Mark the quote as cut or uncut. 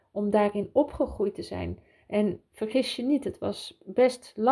uncut